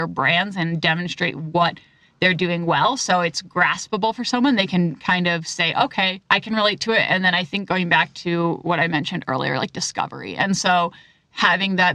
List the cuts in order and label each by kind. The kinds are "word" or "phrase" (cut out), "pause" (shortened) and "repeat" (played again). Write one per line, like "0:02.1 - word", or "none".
0:06.2 - pause